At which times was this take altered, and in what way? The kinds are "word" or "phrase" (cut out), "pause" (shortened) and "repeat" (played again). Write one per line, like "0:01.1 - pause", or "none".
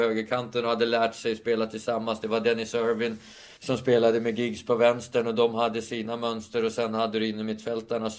0:03.6 - pause